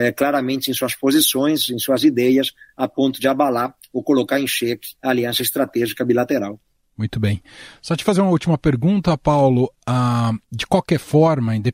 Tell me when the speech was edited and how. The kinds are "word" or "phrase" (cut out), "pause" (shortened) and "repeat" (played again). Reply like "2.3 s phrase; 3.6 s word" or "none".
4.9 s pause; 10.4 s pause